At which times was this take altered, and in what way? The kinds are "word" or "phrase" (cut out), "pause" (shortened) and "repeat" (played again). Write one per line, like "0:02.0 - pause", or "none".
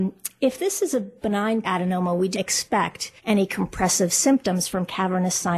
0:01.6 - word
0:02.3 - word
0:03.2 - pause